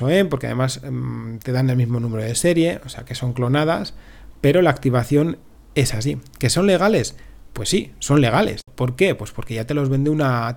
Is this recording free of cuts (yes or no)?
yes